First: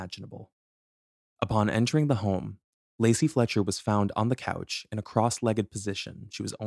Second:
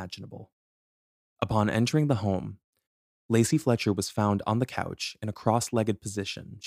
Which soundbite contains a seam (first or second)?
first